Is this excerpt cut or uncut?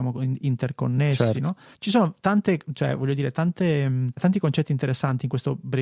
cut